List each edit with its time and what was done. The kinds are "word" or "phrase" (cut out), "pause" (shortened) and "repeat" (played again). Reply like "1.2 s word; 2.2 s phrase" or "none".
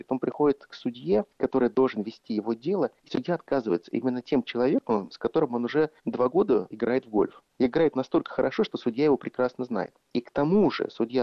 1.3 s pause; 3.0 s pause; 6.0 s pause; 6.7 s word

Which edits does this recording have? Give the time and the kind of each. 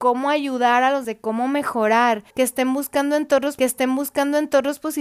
1.0 s word; 2.3 s pause; 3.6 s repeat

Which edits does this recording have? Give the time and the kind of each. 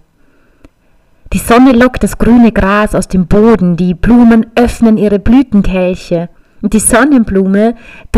6.4 s pause

